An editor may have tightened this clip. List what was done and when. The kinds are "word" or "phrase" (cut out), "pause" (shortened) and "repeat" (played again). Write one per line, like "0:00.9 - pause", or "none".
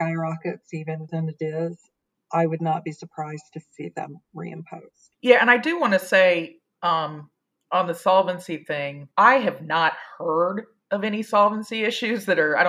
0:01.1 - word
0:05.1 - pause
0:09.1 - pause